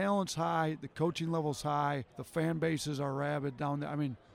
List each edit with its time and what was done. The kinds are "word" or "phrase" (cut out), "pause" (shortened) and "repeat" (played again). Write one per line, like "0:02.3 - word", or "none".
0:02.1 - pause